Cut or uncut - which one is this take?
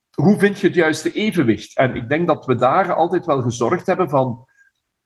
uncut